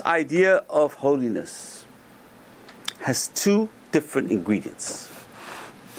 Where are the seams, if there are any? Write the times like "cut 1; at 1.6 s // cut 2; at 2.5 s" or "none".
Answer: none